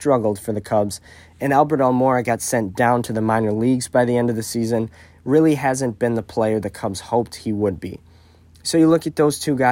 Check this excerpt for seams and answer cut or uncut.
uncut